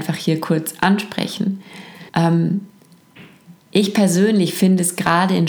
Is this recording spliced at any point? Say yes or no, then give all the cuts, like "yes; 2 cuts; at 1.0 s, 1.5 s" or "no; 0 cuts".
yes; 1 cut; at 2.1 s